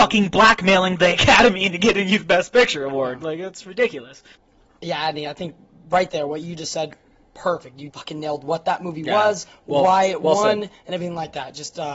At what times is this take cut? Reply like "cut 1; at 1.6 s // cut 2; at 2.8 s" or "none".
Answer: cut 1; at 7.9 s